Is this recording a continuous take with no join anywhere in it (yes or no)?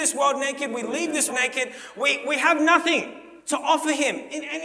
no